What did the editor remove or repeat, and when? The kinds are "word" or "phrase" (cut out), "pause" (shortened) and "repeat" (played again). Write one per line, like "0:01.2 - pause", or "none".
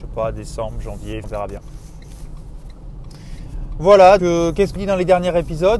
0:01.2 - word
0:04.2 - word
0:04.8 - word